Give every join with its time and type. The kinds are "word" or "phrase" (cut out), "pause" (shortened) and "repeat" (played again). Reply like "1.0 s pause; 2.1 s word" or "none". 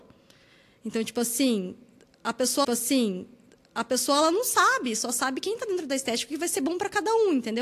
2.6 s repeat

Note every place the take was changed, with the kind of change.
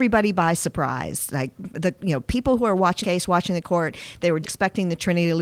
3.0 s word; 4.4 s word

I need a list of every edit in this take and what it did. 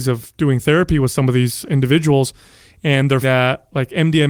1.6 s word; 3.2 s word

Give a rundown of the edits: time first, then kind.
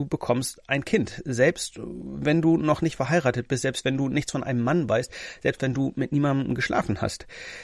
none

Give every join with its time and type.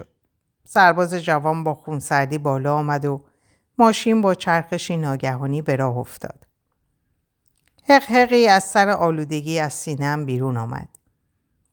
none

